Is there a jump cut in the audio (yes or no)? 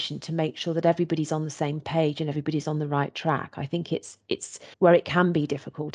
yes